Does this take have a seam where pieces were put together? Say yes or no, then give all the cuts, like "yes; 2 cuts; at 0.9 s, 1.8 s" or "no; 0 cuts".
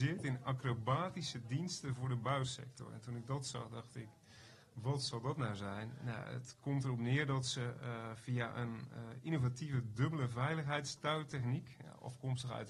no; 0 cuts